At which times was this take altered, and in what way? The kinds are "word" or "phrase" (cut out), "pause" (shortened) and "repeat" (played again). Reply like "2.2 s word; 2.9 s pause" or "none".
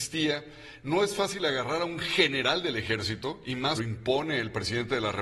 3.8 s phrase